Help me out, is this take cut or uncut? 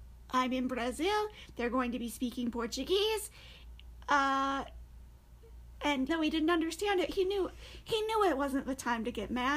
cut